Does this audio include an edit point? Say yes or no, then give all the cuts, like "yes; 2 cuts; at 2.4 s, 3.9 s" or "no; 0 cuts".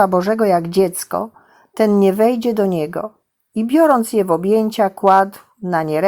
no; 0 cuts